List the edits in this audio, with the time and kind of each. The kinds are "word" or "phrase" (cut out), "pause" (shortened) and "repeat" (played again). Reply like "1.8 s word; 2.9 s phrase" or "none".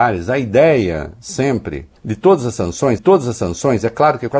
2.0 s pause; 3.0 s repeat